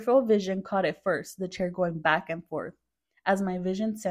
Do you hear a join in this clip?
no; 0 cuts

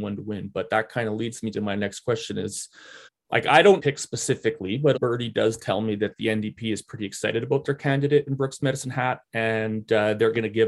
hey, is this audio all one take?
no; 3 cuts; at 3.1 s, 3.8 s, 4.9 s

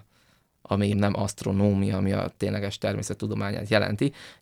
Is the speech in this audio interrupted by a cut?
yes; 2 cuts; at 0.9 s, 2.3 s

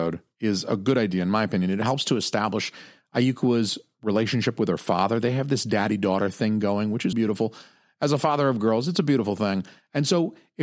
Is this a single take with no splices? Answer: no; 1 cut; at 7.1 s

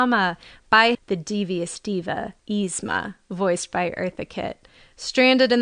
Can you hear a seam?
yes; 2 cuts; at 0.9 s, 2.4 s

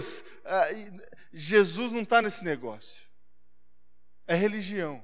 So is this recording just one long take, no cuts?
yes; 0 cuts

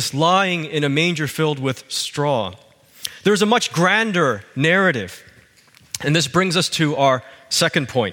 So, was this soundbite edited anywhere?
no; 0 cuts

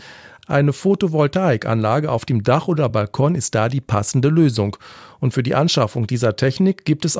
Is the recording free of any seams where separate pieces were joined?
yes; 0 cuts

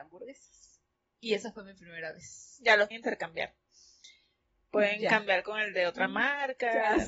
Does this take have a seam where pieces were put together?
yes; 1 cut; at 2.9 s

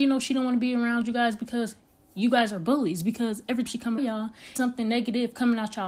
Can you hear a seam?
yes; 3 cuts; at 3.7 s, 4.0 s, 4.6 s

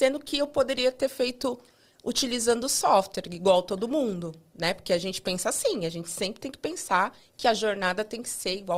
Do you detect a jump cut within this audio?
no; 0 cuts

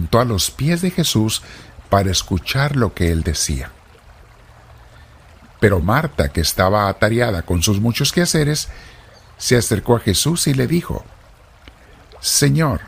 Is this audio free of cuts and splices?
yes; 0 cuts

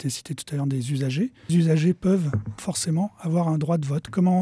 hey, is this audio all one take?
no; 2 cuts; at 1.5 s, 2.6 s

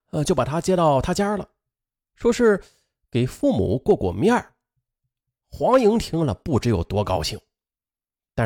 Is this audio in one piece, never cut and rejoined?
yes; 0 cuts

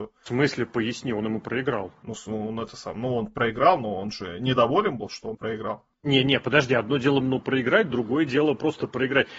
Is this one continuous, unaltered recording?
no; 4 cuts; at 2.0 s, 5.3 s, 5.9 s, 7.2 s

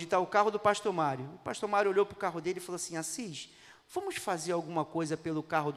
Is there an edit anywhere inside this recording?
no; 0 cuts

